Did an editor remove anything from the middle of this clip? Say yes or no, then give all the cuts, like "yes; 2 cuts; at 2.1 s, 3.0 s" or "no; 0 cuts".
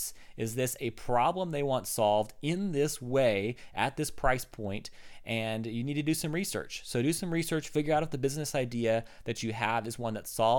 no; 0 cuts